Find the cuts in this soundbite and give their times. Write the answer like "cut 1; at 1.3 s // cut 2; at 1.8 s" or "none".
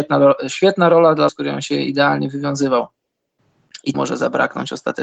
cut 1; at 1.3 s // cut 2; at 3.9 s